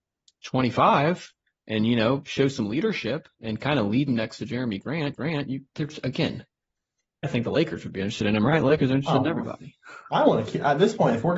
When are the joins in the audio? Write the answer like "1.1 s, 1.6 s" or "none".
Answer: 1.5 s, 3.3 s, 4.1 s, 5.1 s, 7.2 s